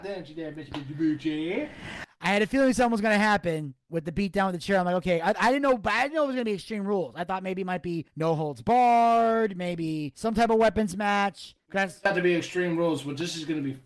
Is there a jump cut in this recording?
no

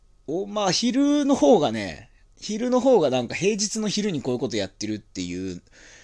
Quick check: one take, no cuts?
no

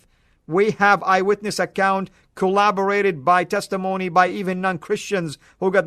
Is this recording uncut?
yes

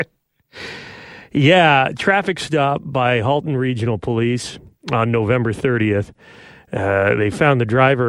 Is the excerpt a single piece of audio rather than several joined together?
yes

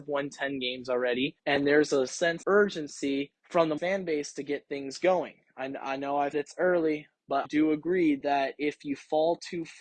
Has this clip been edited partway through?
yes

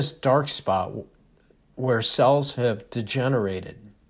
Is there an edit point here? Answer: no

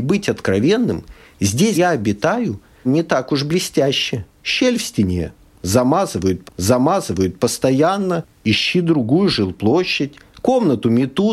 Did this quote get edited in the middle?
yes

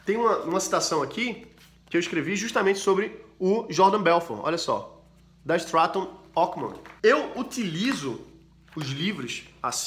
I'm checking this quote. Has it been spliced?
no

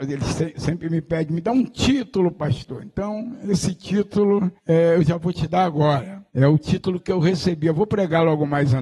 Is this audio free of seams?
no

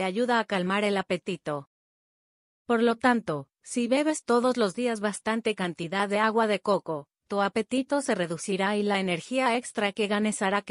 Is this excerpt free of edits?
yes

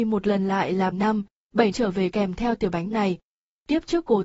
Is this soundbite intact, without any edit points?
no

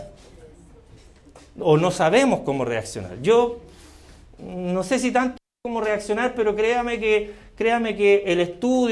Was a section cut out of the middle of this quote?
no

